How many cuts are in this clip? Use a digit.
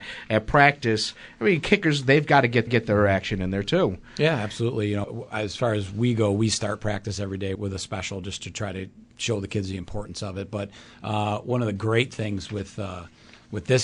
3